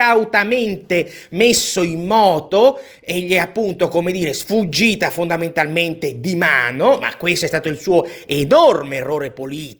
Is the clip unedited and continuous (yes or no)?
yes